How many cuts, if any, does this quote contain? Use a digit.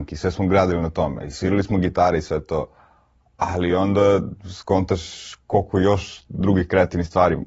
0